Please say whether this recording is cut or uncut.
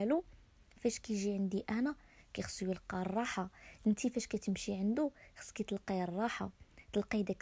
uncut